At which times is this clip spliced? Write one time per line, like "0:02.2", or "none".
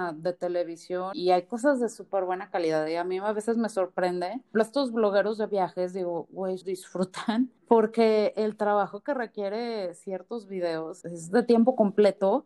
0:01.1
0:04.5
0:06.6
0:07.6
0:11.0